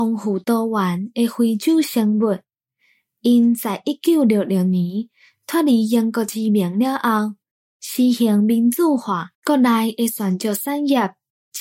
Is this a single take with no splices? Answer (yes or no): no